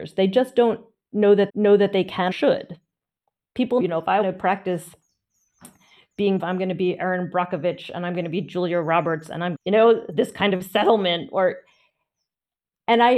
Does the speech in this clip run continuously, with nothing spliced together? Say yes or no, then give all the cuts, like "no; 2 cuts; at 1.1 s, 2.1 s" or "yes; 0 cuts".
no; 6 cuts; at 1.5 s, 2.3 s, 3.8 s, 4.2 s, 6.4 s, 9.5 s